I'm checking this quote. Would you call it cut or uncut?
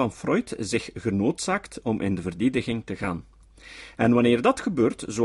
uncut